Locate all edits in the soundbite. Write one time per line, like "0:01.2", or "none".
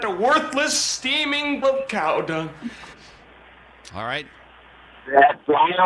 0:01.6